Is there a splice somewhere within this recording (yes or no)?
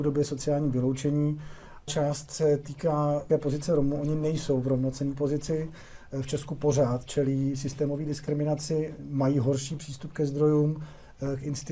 yes